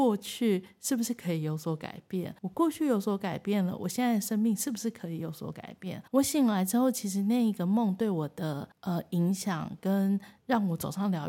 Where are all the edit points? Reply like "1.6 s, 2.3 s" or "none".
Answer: 2.4 s, 6.1 s, 8.7 s